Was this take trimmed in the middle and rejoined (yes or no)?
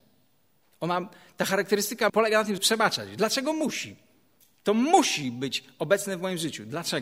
yes